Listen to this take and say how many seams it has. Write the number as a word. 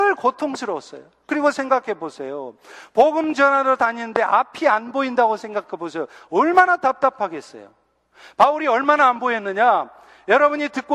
zero